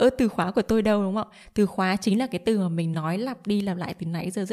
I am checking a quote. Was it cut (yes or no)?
no